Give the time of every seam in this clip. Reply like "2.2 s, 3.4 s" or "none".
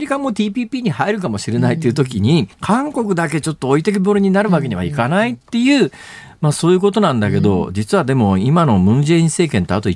2.5 s